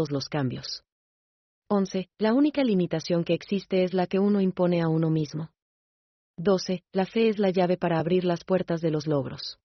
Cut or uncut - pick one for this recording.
uncut